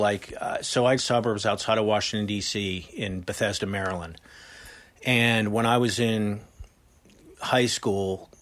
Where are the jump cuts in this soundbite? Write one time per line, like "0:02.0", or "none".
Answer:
0:01.0